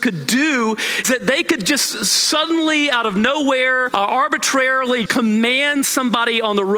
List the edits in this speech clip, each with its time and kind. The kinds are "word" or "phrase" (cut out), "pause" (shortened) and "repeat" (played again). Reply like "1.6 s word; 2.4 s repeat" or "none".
1.0 s word; 3.9 s word; 5.1 s word